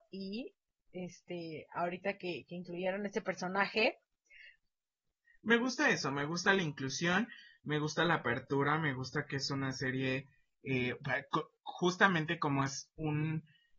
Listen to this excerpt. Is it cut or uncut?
uncut